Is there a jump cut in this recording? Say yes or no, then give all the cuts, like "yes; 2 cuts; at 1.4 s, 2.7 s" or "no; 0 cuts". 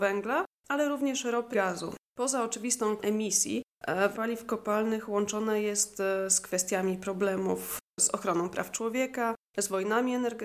yes; 3 cuts; at 1.5 s, 3.0 s, 4.1 s